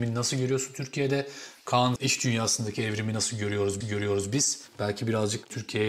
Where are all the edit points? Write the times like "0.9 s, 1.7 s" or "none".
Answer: 2.0 s, 3.8 s